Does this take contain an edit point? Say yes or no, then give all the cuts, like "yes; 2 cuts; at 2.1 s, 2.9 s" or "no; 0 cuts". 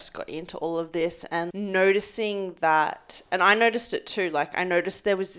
yes; 1 cut; at 1.5 s